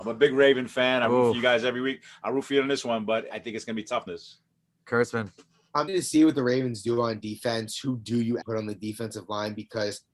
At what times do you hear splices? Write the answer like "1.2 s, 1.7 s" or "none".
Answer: 3.3 s, 4.1 s, 5.9 s, 8.4 s